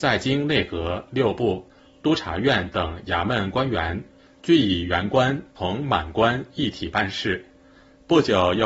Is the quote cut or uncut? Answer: uncut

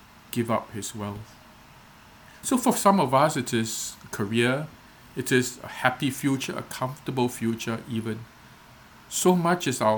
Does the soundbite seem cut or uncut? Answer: uncut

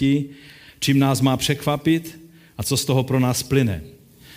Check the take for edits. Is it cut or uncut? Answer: uncut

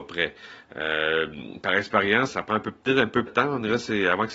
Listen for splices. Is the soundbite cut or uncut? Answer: cut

